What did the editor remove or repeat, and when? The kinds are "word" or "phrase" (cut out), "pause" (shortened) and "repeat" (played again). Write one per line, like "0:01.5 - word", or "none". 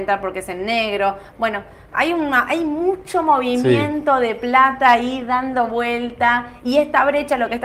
none